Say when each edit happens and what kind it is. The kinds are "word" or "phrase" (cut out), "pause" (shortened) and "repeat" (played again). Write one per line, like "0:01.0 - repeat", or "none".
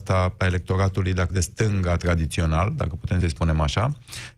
0:01.3 - word
0:03.2 - word